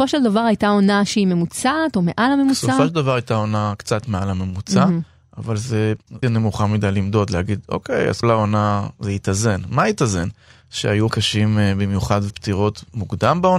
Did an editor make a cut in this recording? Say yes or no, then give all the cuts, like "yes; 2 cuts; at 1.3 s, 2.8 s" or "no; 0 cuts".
yes; 4 cuts; at 6.2 s, 8.2 s, 11.1 s, 12.3 s